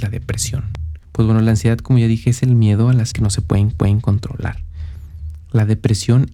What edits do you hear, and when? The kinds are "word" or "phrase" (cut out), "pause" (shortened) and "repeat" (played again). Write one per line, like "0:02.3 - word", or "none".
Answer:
0:01.0 - pause
0:03.1 - word
0:03.7 - repeat